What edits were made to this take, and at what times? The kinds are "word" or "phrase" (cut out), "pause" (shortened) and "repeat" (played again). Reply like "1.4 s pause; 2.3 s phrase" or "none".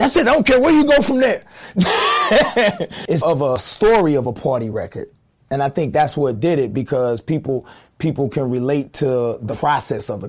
3.2 s word